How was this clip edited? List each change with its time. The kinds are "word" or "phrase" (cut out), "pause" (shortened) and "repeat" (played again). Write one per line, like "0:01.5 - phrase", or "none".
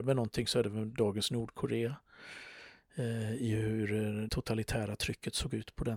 0:04.3 - word